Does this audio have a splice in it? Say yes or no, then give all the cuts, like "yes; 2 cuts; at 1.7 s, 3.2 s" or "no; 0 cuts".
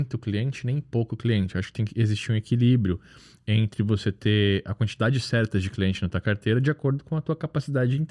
no; 0 cuts